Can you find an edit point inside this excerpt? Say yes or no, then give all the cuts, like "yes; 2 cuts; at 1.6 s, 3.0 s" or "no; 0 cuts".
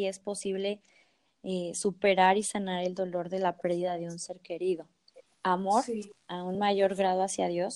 no; 0 cuts